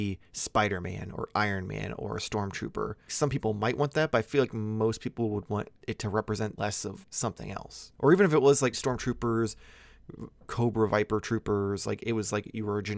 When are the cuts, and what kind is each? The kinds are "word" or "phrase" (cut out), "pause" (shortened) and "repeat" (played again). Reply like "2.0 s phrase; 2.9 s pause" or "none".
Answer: 3.1 s word; 5.8 s pause; 6.6 s phrase; 7.0 s word; 7.9 s pause; 8.7 s word